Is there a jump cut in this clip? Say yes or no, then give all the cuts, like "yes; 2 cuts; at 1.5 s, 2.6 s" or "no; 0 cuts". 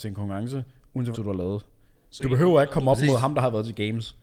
yes; 2 cuts; at 1.1 s, 2.2 s